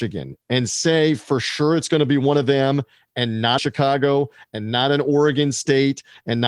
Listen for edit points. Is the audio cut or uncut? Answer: cut